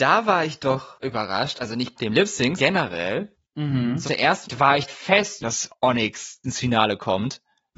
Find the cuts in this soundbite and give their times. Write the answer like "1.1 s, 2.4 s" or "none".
1.0 s, 2.0 s, 2.6 s, 4.0 s, 4.4 s, 4.9 s, 5.4 s, 6.4 s